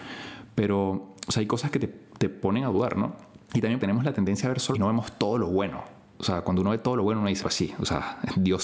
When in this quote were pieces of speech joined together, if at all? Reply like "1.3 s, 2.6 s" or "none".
3.4 s, 3.8 s, 4.7 s, 7.4 s

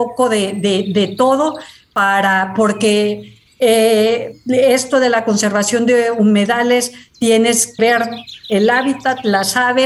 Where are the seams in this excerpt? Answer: 7.8 s

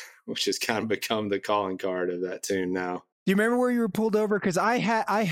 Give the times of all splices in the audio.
3.1 s

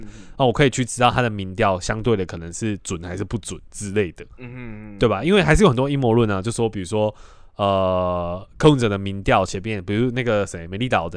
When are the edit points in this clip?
none

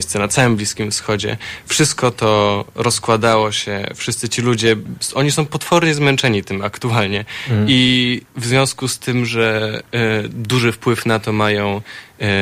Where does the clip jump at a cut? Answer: 8.3 s

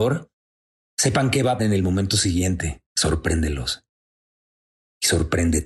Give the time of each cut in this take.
1.6 s, 2.9 s

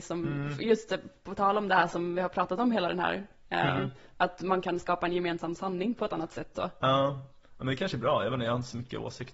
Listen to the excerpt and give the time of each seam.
none

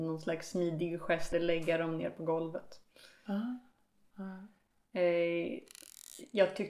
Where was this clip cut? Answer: 1.3 s

